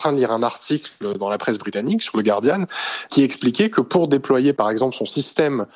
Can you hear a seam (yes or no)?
no